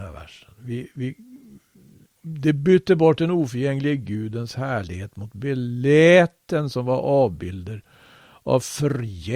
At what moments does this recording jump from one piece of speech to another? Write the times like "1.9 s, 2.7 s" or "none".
none